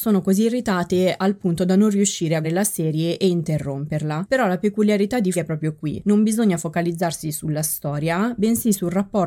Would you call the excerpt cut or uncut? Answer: cut